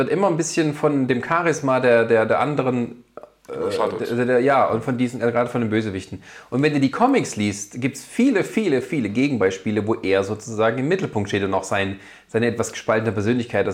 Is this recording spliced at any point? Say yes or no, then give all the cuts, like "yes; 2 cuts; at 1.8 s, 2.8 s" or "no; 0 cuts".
no; 0 cuts